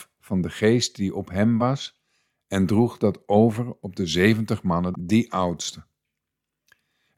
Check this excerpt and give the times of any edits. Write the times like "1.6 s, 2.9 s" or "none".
none